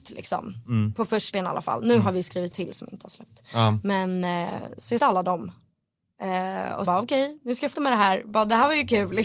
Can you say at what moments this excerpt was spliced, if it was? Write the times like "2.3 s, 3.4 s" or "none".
1.3 s, 2.5 s, 5.0 s, 6.8 s, 7.7 s